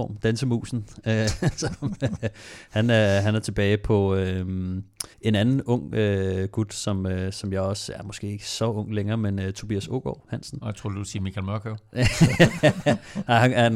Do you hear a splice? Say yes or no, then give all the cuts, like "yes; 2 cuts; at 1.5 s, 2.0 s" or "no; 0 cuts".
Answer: yes; 1 cut; at 5.1 s